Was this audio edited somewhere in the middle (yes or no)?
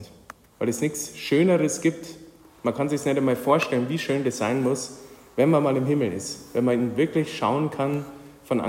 no